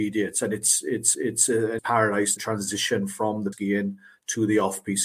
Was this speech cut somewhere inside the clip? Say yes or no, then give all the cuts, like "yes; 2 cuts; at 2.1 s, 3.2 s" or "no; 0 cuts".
yes; 4 cuts; at 1.1 s, 1.8 s, 2.4 s, 3.5 s